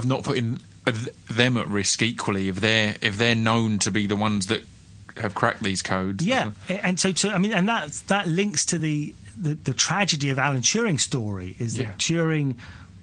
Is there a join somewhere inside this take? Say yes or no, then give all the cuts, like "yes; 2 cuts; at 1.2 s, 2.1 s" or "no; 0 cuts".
no; 0 cuts